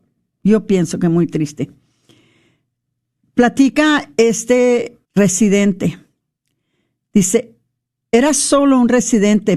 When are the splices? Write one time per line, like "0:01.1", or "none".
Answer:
0:05.0